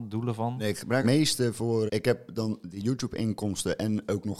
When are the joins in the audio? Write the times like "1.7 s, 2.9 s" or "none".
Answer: 1.0 s, 1.9 s